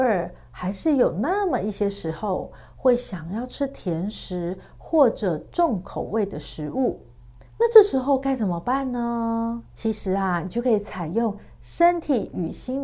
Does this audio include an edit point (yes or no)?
yes